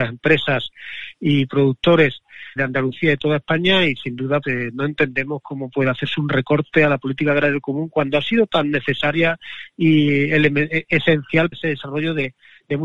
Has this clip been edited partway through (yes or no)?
yes